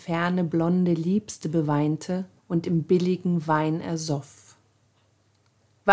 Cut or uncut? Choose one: cut